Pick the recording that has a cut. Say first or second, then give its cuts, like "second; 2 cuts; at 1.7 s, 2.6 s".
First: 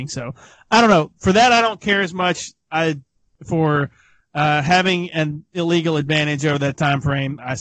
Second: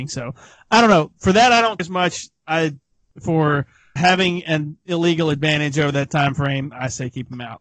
second; 2 cuts; at 1.8 s, 4.0 s